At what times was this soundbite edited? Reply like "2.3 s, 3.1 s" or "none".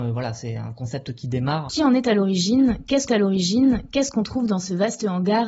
3.1 s